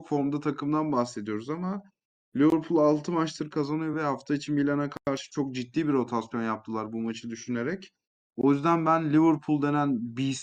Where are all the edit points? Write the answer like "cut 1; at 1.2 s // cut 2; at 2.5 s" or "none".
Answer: none